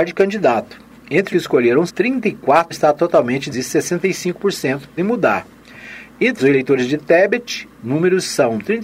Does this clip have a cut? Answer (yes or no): yes